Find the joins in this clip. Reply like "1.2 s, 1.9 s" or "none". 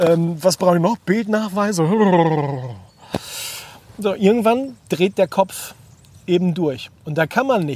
none